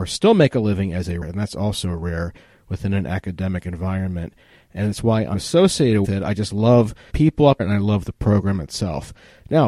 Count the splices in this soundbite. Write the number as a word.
five